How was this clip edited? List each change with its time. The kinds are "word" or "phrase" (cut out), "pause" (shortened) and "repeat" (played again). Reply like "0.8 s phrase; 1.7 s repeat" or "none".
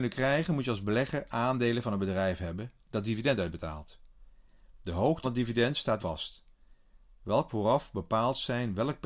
5.2 s word; 6.0 s word; 7.5 s word